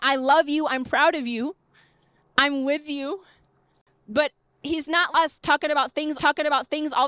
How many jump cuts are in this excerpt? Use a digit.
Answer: 2